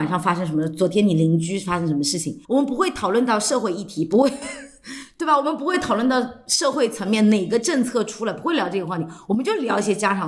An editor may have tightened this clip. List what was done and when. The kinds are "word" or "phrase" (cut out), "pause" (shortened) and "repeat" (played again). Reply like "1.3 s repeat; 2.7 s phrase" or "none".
2.4 s pause